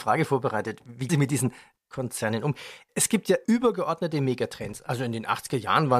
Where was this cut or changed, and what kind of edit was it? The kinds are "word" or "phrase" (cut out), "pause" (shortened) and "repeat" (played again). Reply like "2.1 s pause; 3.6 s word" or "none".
1.1 s word; 1.8 s word; 3.4 s word